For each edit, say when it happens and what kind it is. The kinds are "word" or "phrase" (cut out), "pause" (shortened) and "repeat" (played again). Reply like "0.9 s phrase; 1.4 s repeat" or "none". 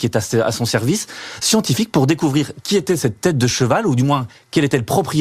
none